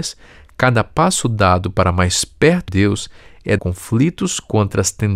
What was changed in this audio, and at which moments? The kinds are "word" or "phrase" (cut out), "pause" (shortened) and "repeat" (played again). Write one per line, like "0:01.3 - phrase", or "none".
0:02.7 - word
0:03.6 - phrase